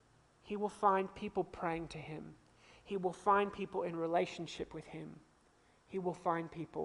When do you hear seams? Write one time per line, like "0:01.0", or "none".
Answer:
none